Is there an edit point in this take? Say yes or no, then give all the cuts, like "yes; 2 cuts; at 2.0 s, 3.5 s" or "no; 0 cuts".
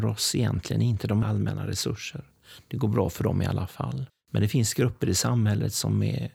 yes; 2 cuts; at 1.2 s, 4.1 s